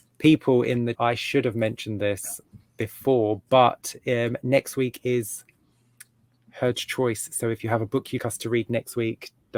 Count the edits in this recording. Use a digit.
2